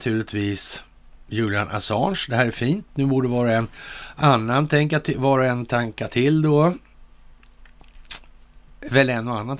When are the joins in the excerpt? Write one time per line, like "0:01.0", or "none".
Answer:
none